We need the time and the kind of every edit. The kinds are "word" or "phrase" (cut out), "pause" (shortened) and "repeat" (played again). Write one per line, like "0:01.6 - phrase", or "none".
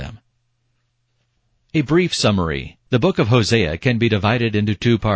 0:02.8 - pause

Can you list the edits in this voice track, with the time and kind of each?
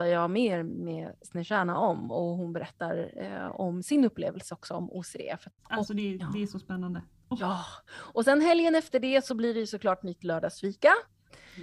none

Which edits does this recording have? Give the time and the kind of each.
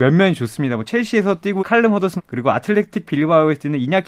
0:01.6 - word
0:02.2 - word

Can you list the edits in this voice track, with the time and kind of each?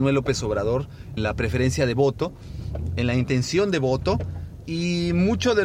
0:01.2 - word

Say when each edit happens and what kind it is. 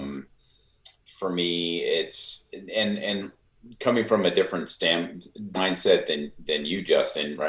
0:01.0 - pause
0:05.5 - word

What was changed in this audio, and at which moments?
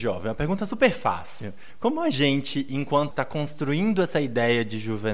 0:03.1 - word

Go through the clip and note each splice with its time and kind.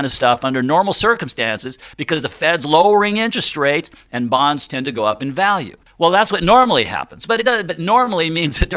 0:05.9 - pause

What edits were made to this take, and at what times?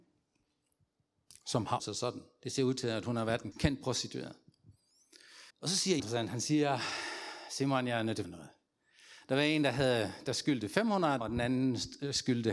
0:01.8 - word
0:03.5 - word
0:05.5 - pause
0:06.0 - phrase
0:08.2 - word
0:11.2 - word

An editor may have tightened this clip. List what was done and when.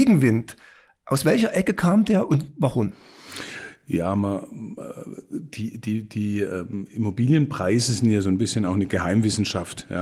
none

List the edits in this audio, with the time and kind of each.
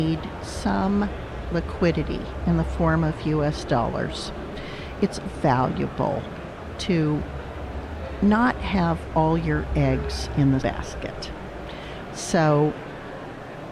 0:05.3 - word
0:10.6 - word

